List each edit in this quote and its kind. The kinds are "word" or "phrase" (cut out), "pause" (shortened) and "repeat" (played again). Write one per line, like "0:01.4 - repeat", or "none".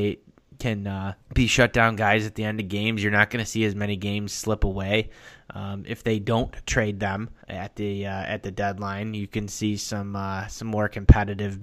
0:01.2 - pause
0:07.4 - pause